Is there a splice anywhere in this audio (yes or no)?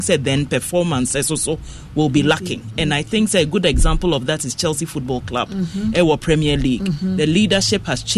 no